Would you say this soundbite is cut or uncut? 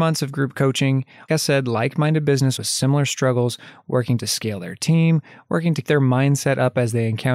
cut